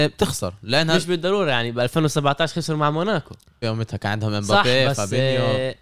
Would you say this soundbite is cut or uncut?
cut